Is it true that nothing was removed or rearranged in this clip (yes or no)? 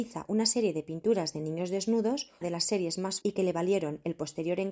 no